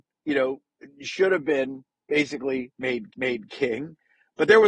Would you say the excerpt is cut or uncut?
cut